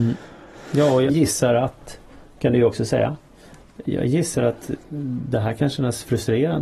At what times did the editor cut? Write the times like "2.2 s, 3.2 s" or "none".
1.1 s